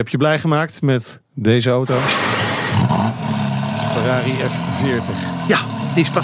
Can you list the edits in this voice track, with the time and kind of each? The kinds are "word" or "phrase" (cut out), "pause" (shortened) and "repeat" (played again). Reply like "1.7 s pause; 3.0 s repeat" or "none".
1.2 s pause